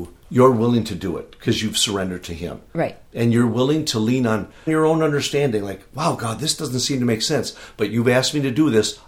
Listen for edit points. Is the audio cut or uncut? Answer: cut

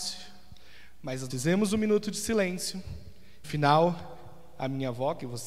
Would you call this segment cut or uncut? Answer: cut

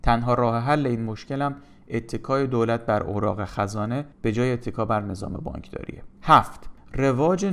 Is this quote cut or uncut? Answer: cut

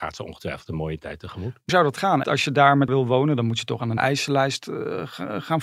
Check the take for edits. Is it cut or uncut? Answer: cut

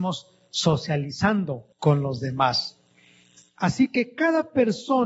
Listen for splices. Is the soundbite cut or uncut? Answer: cut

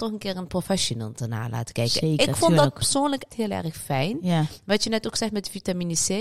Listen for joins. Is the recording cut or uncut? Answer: cut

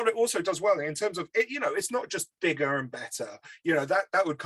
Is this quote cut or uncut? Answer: uncut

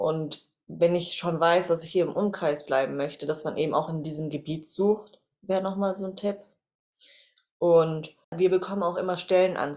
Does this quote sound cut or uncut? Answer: cut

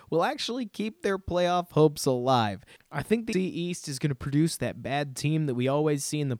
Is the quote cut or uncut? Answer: cut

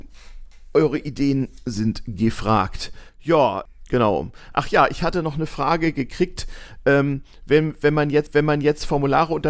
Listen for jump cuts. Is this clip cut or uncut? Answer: cut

